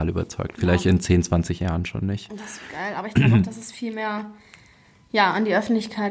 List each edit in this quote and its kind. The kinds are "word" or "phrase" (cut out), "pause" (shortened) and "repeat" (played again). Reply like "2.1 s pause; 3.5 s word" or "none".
2.7 s word

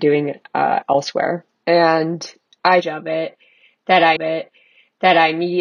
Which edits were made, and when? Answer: 1.5 s pause; 2.8 s phrase; 4.2 s repeat

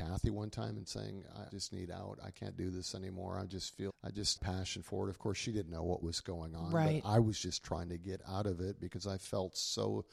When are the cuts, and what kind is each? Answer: 1.5 s phrase; 3.9 s word; 4.4 s phrase; 6.0 s word

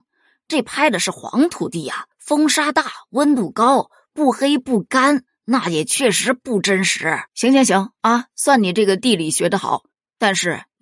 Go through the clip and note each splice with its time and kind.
2.1 s pause; 7.3 s pause

